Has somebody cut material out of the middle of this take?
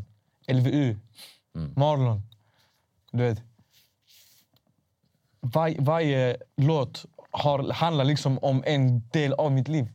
no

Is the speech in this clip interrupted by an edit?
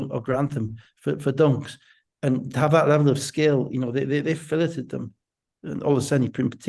no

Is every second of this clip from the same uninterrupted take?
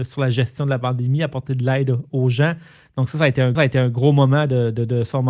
no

